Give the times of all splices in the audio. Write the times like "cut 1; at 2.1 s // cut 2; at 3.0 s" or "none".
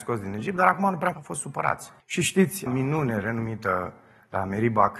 cut 1; at 1.1 s // cut 2; at 2.0 s // cut 3; at 2.7 s